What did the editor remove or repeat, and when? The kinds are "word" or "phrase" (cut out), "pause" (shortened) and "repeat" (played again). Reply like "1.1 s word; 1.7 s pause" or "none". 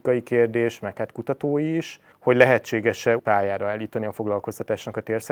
2.1 s pause; 3.2 s word